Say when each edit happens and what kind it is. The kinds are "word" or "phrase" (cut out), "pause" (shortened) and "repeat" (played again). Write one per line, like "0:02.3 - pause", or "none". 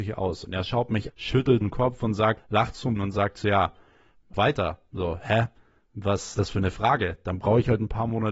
0:01.1 - word
0:01.6 - word
0:02.4 - word
0:03.0 - word
0:04.3 - word
0:06.3 - word

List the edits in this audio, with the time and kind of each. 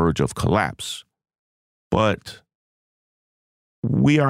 none

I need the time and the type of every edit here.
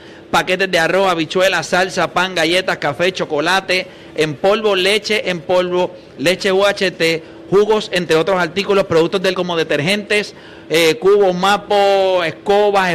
0:09.3 - phrase

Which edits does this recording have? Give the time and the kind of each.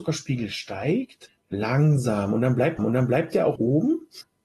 0:02.8 - repeat
0:03.6 - word

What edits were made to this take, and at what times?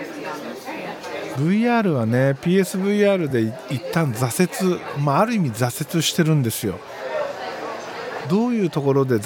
none

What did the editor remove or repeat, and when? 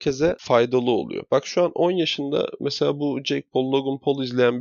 none

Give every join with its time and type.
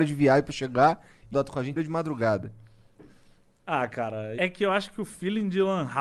0:01.3 - word
0:01.8 - word
0:04.4 - word

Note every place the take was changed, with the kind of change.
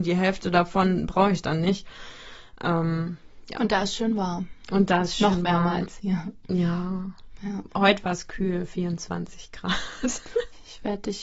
none

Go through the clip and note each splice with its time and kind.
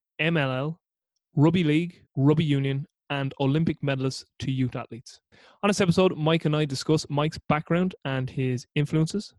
0:02.1 - pause
0:05.3 - pause

